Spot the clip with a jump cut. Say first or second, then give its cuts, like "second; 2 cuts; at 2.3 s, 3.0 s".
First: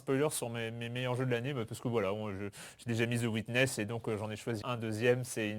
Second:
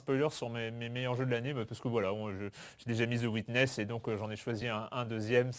first; 1 cut; at 4.6 s